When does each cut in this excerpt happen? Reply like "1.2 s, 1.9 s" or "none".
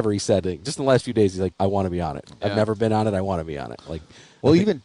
1.6 s